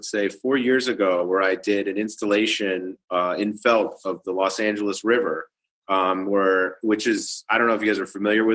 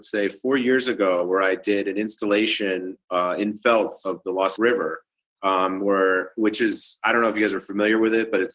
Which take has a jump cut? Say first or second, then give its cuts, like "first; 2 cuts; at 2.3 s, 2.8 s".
second; 1 cut; at 4.6 s